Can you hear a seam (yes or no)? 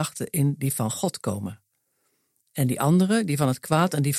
no